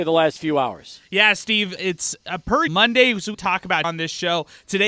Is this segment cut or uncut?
cut